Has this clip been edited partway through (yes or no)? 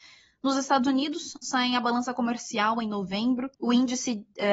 yes